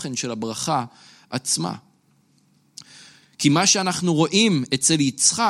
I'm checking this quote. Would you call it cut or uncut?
uncut